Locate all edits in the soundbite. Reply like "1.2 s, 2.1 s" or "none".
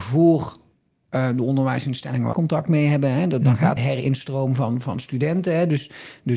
2.3 s, 3.8 s